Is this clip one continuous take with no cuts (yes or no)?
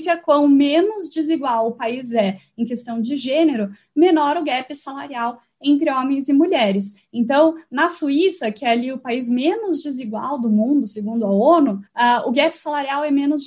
no